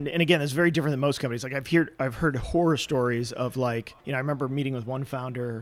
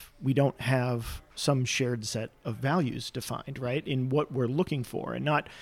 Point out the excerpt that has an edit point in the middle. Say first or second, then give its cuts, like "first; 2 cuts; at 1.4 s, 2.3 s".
first; 1 cut; at 4.0 s